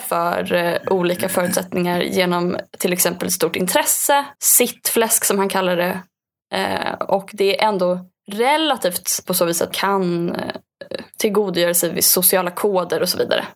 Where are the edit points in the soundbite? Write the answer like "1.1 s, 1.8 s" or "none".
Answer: 4.4 s, 9.3 s, 9.7 s